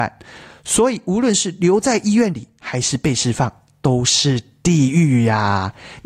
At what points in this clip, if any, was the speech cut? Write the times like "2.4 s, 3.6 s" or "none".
none